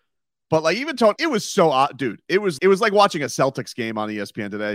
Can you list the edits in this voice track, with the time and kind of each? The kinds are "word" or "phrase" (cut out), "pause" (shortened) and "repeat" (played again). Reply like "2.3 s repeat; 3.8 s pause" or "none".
1.2 s word; 2.6 s word